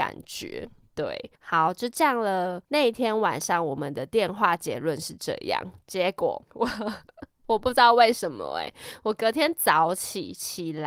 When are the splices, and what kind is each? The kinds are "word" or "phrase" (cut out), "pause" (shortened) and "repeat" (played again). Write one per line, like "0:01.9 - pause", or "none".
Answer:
0:01.3 - pause
0:02.6 - pause
0:06.4 - pause